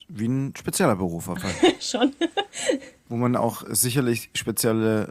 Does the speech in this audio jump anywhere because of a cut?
yes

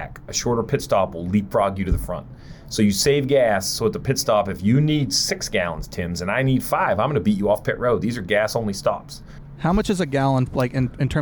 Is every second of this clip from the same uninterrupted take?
yes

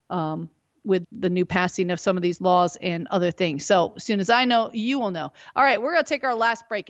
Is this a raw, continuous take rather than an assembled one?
no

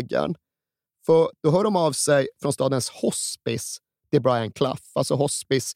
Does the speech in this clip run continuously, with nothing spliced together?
yes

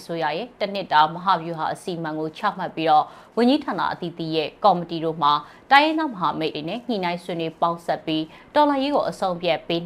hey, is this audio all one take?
no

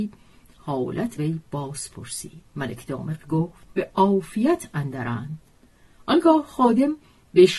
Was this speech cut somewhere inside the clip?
yes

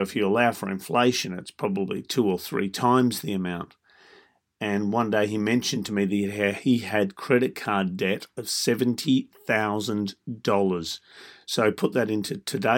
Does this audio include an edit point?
no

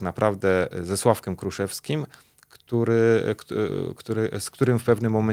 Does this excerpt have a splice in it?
no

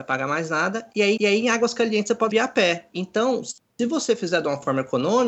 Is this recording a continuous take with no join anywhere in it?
no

